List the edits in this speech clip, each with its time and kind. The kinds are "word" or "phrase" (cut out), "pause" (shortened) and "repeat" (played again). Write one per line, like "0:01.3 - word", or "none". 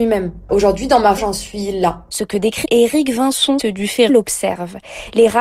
0:01.2 - word
0:02.6 - word
0:03.6 - word
0:04.1 - word